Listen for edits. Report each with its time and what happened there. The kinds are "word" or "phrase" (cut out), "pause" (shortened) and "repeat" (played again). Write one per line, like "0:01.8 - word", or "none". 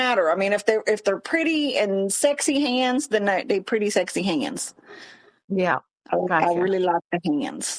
none